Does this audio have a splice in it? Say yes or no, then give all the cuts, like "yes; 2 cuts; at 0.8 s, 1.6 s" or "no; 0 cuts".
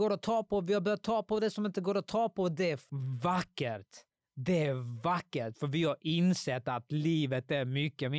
yes; 1 cut; at 4.1 s